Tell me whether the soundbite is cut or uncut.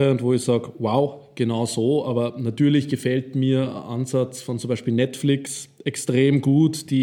uncut